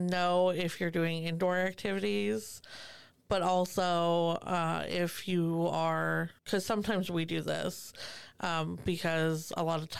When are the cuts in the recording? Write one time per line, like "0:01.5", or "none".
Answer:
0:06.4

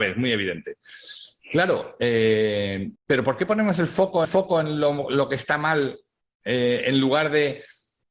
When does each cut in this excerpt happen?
0:03.0
0:04.2

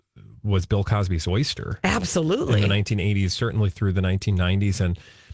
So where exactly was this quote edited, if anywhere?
none

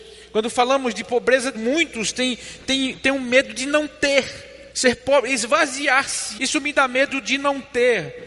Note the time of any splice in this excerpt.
0:01.5
0:04.7
0:06.4

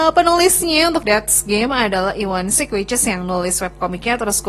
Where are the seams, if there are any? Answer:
0:01.1

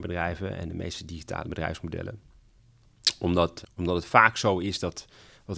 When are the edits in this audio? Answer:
0:01.4
0:03.6

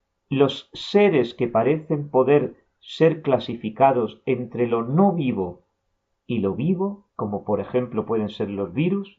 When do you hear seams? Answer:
0:07.1

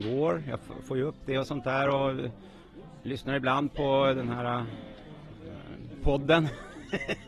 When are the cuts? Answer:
none

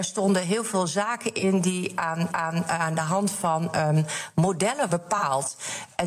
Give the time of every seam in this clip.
0:02.3
0:04.9

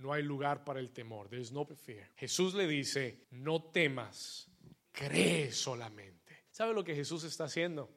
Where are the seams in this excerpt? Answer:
0:01.7
0:02.1
0:03.2
0:04.8
0:06.5

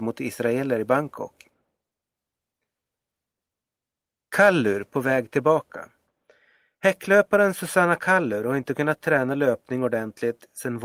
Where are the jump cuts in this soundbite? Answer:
none

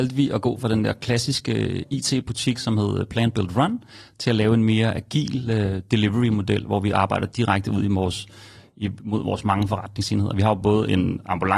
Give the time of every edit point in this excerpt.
none

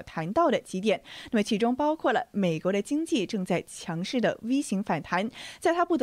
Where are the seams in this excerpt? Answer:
none

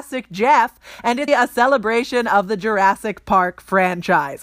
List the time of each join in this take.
0:01.3

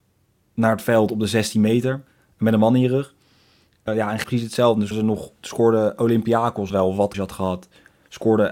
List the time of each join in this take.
0:03.9
0:04.2
0:04.9
0:06.7
0:07.1

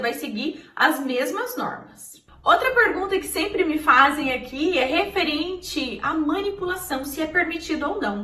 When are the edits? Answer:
none

